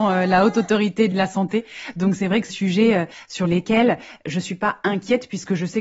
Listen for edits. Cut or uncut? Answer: cut